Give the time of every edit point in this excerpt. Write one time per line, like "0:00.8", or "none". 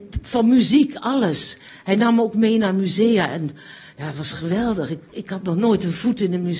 none